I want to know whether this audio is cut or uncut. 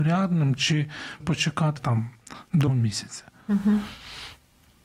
cut